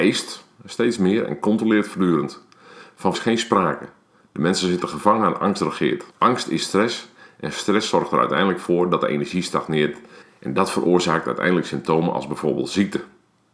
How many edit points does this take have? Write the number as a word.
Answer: three